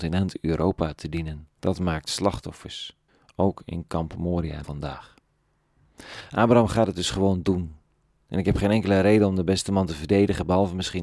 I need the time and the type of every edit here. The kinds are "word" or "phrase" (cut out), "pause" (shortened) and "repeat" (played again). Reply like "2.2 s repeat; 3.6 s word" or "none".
1.6 s pause; 3.1 s pause; 4.6 s word